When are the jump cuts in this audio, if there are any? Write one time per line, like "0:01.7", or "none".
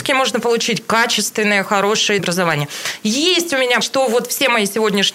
0:02.2
0:03.8